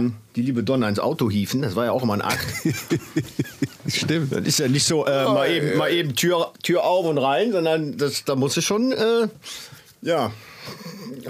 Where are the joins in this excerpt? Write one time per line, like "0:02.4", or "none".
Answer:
none